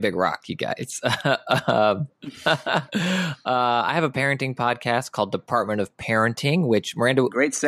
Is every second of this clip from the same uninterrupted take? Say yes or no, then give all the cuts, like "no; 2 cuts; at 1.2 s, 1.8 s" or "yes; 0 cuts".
yes; 0 cuts